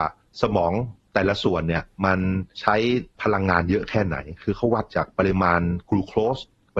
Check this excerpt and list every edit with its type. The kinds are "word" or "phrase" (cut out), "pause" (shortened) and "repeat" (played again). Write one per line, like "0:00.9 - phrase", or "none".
0:02.5 - pause
0:03.1 - pause